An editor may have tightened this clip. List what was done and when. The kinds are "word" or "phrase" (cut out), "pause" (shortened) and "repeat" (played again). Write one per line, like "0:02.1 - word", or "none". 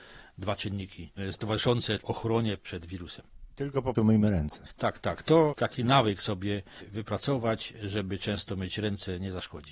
0:04.0 - word
0:05.6 - word